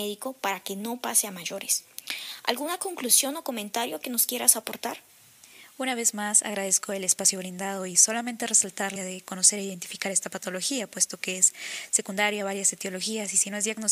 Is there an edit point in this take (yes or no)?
yes